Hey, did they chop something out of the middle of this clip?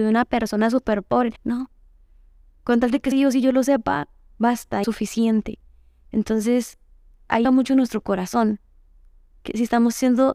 yes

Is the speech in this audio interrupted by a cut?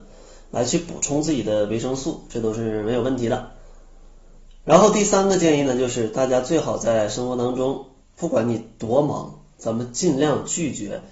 yes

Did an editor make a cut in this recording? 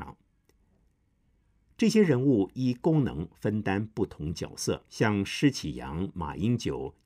yes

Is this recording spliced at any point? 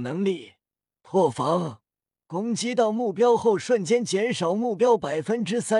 no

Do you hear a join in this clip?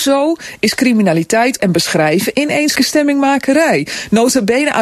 yes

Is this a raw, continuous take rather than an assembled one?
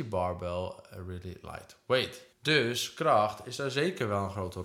no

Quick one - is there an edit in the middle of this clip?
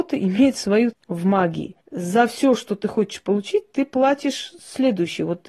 yes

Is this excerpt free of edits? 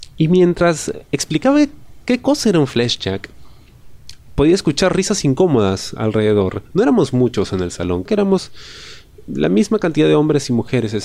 no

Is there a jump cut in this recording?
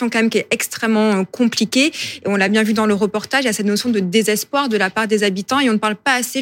no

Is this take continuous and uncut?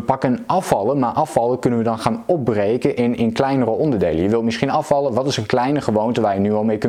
yes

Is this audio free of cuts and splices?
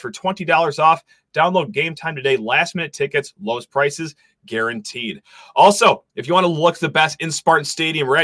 no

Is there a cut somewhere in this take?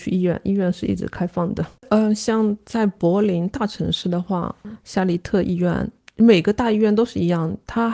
yes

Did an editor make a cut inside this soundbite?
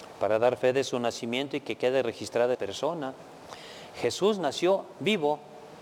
yes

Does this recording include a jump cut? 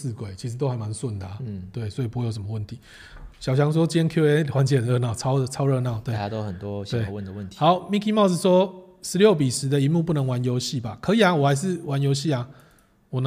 no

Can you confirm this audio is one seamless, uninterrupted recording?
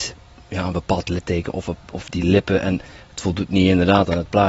yes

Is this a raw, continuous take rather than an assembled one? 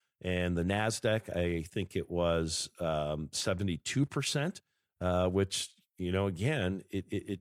yes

